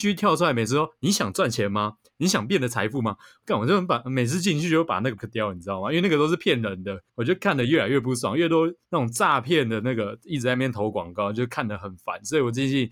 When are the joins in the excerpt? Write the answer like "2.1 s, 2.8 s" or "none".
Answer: 5.2 s, 7.1 s, 8.8 s